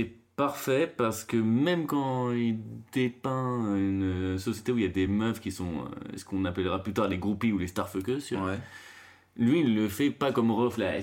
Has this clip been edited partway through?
no; 0 cuts

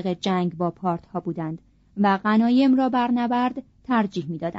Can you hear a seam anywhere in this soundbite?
no; 0 cuts

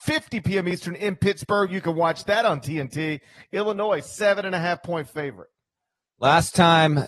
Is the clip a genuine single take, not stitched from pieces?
yes; 0 cuts

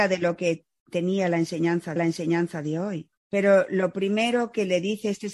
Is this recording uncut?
no; 2 cuts; at 2.0 s, 3.2 s

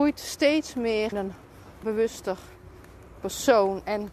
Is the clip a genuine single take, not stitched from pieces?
no; 2 cuts; at 1.1 s, 1.8 s

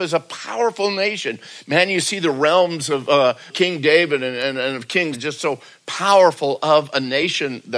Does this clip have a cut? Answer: yes; 1 cut; at 5.1 s

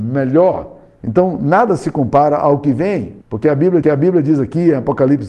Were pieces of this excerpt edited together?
yes; 2 cuts; at 3.2 s, 3.8 s

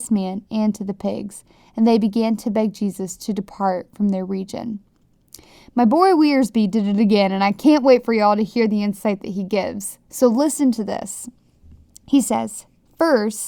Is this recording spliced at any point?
no; 0 cuts

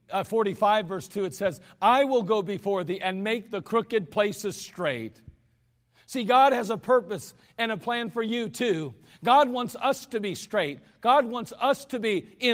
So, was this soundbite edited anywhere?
no; 0 cuts

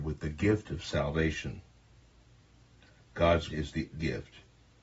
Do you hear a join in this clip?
yes; 2 cuts; at 3.5 s, 3.9 s

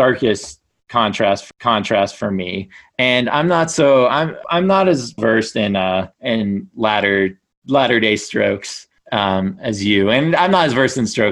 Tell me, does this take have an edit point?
yes; 5 cuts; at 1.5 s, 4.4 s, 5.2 s, 6.1 s, 9.0 s

